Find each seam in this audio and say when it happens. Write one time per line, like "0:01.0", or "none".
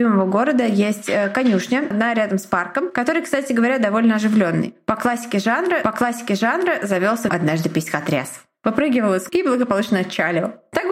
0:01.9
0:05.8
0:07.3
0:09.3